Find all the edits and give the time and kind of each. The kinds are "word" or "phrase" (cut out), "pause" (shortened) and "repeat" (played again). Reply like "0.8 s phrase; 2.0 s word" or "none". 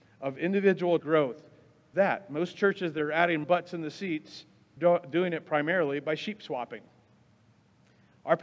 1.0 s word; 1.9 s word; 3.4 s word; 4.8 s word